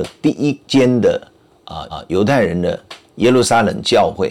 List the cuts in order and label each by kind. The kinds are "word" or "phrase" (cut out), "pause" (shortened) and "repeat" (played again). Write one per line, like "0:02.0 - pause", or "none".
0:01.9 - repeat